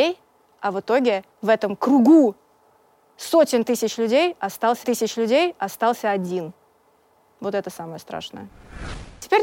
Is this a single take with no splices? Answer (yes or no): no